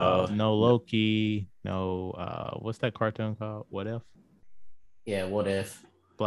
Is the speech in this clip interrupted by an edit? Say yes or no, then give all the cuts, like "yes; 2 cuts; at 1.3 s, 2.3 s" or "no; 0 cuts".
no; 0 cuts